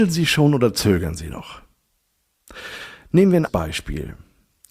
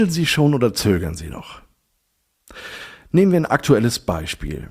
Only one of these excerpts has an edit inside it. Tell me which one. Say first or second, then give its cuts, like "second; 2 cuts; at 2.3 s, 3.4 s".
first; 1 cut; at 3.5 s